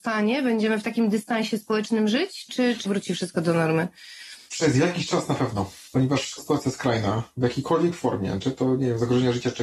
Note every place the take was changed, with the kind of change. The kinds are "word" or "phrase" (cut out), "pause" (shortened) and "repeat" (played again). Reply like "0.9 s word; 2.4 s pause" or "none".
2.5 s word; 2.8 s word; 6.4 s word